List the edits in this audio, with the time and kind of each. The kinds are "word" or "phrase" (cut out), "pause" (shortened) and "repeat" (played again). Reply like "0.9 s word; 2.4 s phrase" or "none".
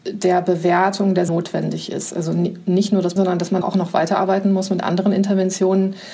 1.3 s word; 3.2 s word; 3.6 s word